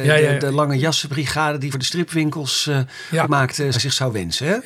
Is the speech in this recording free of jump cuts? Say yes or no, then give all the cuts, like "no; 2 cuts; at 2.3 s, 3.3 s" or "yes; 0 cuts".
no; 3 cuts; at 1.7 s, 3.2 s, 3.7 s